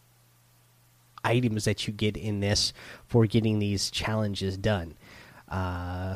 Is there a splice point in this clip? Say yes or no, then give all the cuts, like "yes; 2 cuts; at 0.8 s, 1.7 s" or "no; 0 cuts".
no; 0 cuts